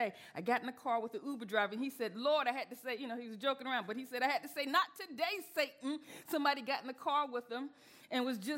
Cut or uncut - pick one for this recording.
uncut